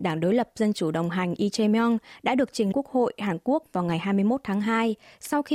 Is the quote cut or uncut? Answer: cut